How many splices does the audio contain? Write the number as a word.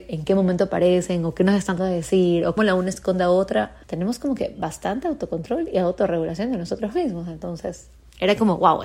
three